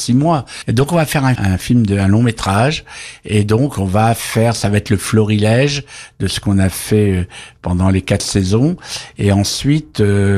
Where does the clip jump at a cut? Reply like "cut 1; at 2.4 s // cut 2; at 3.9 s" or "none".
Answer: cut 1; at 1.4 s

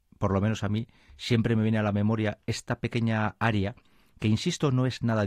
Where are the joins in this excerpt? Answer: none

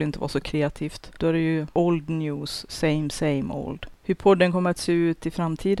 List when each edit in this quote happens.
none

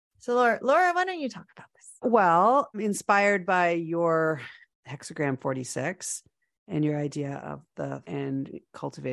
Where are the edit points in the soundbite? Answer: cut 1; at 2.0 s // cut 2; at 8.0 s

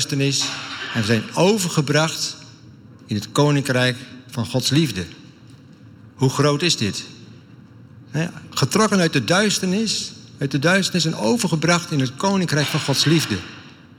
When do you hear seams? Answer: none

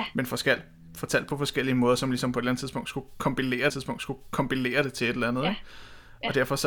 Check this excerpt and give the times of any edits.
cut 1; at 3.7 s

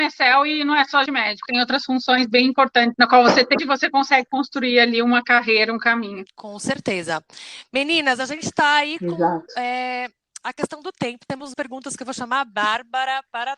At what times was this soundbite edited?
cut 1; at 1.1 s // cut 2; at 1.5 s // cut 3; at 2.9 s // cut 4; at 3.6 s // cut 5; at 11.5 s

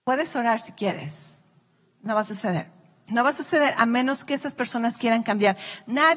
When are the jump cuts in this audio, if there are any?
none

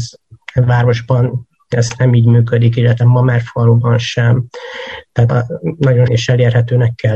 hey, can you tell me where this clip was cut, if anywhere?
cut 1; at 3.0 s // cut 2; at 5.3 s // cut 3; at 6.1 s

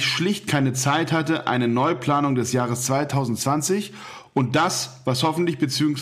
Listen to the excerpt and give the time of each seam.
none

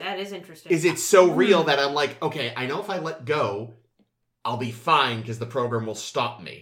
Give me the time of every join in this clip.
none

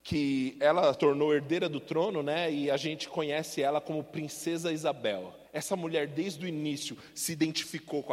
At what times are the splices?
cut 1; at 0.9 s // cut 2; at 5.5 s

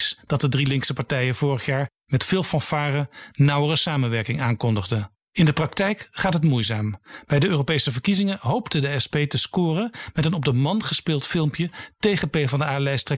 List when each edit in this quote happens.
cut 1; at 5.2 s

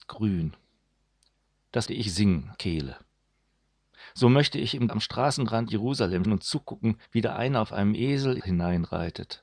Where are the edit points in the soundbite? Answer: cut 1; at 1.9 s // cut 2; at 2.5 s // cut 3; at 4.9 s // cut 4; at 5.7 s // cut 5; at 6.2 s // cut 6; at 7.1 s // cut 7; at 8.4 s

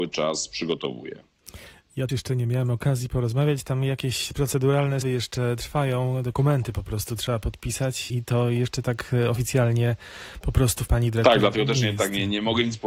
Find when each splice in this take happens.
cut 1; at 2.1 s // cut 2; at 5.0 s // cut 3; at 8.1 s // cut 4; at 10.9 s

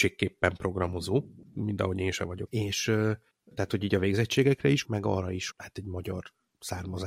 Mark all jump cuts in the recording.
cut 1; at 2.5 s // cut 2; at 4.8 s // cut 3; at 5.5 s

